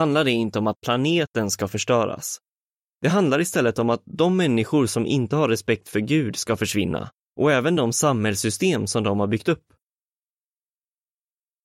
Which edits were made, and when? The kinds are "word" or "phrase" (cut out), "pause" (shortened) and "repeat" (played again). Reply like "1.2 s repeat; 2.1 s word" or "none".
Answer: none